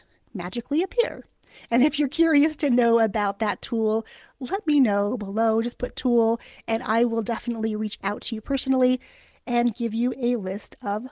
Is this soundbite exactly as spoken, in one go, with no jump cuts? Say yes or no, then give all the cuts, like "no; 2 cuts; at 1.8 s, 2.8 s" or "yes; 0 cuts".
yes; 0 cuts